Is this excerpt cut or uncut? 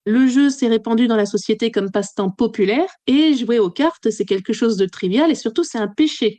cut